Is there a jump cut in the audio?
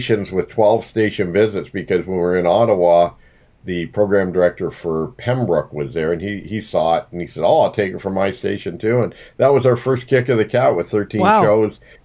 no; 0 cuts

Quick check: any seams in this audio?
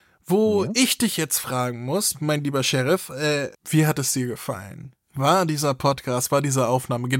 yes; 1 cut; at 3.5 s

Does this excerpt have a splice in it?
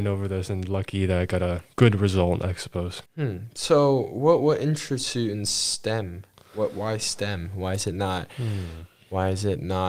yes; 2 cuts; at 1.7 s, 3.1 s

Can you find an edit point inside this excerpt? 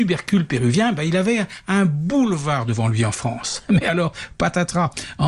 no; 0 cuts

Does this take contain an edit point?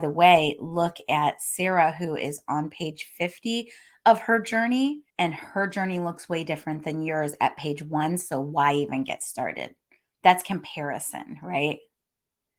yes; 1 cut; at 5.1 s

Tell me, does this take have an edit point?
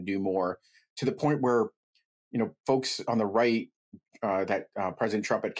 no; 0 cuts

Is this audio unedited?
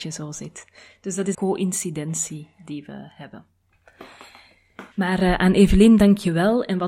no; 2 cuts; at 1.3 s, 4.9 s

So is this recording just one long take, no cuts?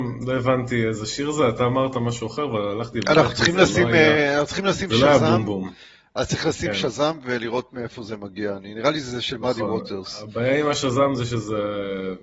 yes; 0 cuts

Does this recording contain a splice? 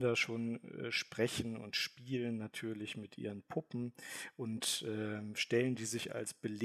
no; 0 cuts

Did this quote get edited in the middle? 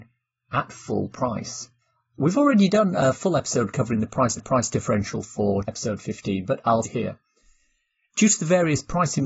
yes; 4 cuts; at 1.8 s, 4.4 s, 5.6 s, 6.8 s

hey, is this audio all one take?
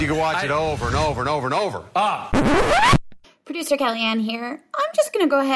yes; 0 cuts

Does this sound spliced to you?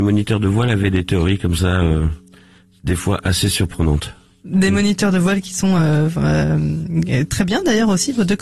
no; 0 cuts

